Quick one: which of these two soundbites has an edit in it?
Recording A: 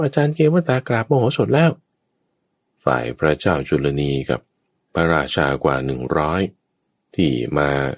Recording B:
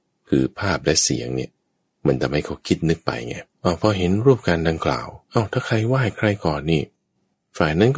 B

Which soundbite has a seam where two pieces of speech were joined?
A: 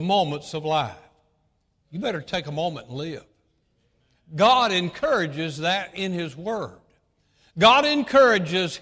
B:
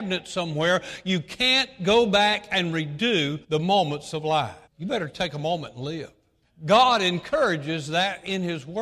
B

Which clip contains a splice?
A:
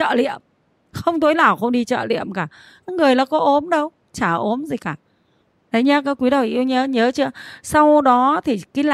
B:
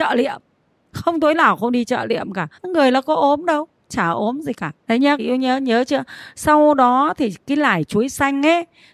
B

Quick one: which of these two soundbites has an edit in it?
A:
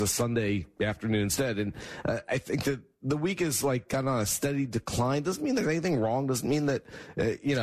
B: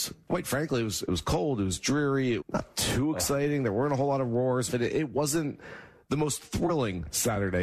B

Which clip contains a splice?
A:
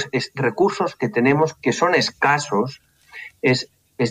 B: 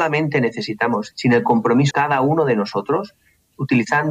B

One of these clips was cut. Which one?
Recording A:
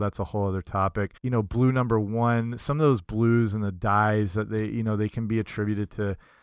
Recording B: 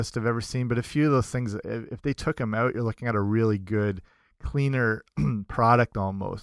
A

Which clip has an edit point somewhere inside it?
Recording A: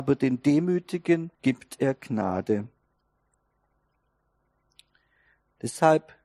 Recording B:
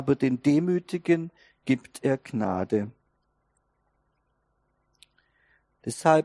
A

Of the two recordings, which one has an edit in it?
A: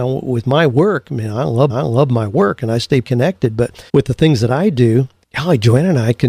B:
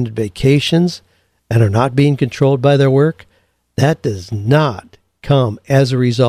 A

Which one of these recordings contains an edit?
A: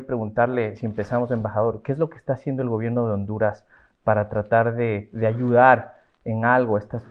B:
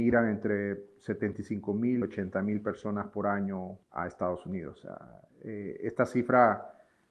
B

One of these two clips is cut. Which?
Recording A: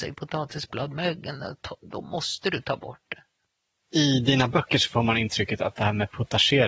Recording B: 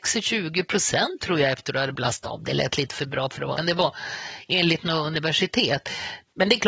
B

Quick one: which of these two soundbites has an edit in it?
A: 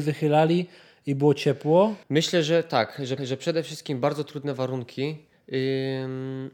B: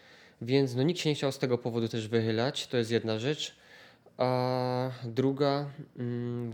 A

